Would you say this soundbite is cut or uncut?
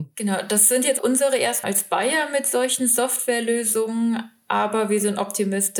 cut